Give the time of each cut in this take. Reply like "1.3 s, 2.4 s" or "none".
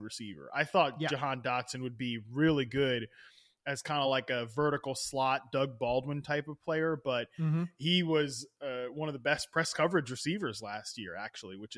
none